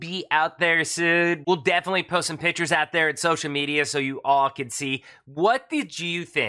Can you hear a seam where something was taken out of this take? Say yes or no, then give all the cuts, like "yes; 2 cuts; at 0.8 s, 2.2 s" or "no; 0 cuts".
no; 0 cuts